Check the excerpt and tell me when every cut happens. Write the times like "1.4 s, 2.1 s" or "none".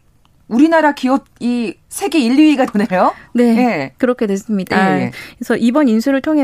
1.8 s, 2.7 s